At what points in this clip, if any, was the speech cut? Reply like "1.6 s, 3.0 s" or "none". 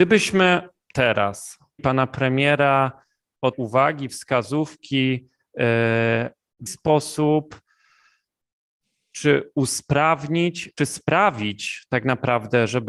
1.8 s, 3.5 s, 6.7 s, 9.1 s, 10.8 s